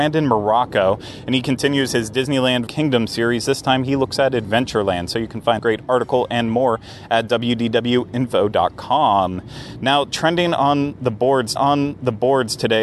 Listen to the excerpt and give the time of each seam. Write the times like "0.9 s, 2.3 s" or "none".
2.7 s, 5.6 s, 11.6 s